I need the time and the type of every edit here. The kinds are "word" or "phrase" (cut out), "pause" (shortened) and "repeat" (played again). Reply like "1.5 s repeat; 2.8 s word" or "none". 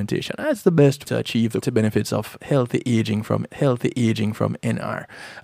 1.1 s word; 1.6 s word; 3.5 s repeat